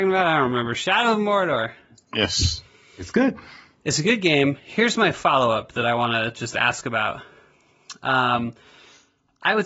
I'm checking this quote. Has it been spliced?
no; 0 cuts

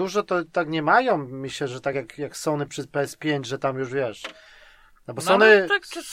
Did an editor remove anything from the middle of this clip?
no; 0 cuts

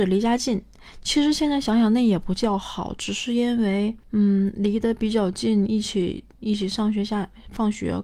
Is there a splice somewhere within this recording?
yes; 1 cut; at 4.0 s

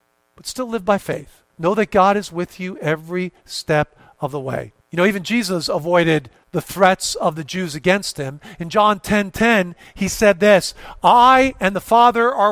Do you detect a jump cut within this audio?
yes; 3 cuts; at 1.5 s, 4.8 s, 6.4 s

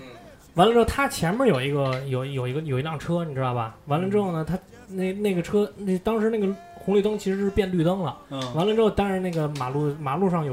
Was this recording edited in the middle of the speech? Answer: no; 0 cuts

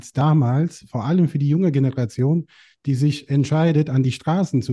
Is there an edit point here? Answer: no; 0 cuts

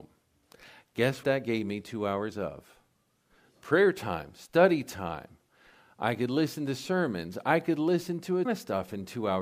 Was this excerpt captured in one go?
no; 3 cuts; at 1.2 s, 2.9 s, 8.5 s

